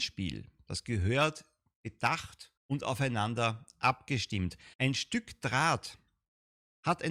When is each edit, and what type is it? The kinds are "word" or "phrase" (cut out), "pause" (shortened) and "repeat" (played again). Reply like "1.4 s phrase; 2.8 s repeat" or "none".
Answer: 2.6 s pause; 4.7 s pause